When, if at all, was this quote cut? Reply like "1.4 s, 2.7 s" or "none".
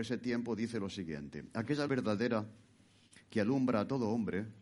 1.9 s, 3.2 s